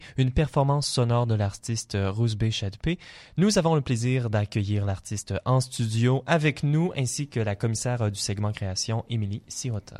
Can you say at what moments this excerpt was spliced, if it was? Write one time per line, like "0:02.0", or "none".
none

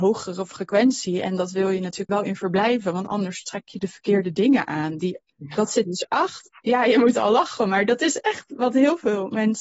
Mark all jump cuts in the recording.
0:02.1
0:05.3
0:05.8

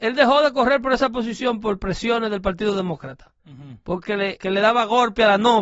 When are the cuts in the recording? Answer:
0:03.4
0:04.0
0:04.4

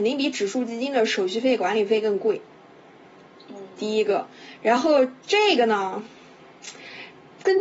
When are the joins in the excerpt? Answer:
none

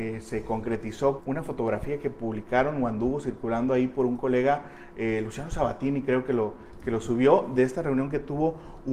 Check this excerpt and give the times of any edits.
0:01.2

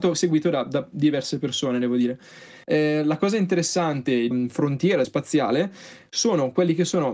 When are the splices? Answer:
0:02.6
0:04.3
0:05.0

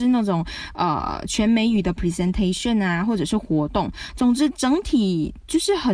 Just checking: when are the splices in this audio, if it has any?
none

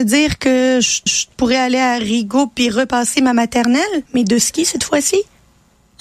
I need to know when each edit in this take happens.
0:01.1
0:04.1

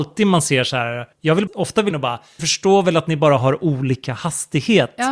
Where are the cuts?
0:01.1
0:01.5
0:01.9
0:02.4

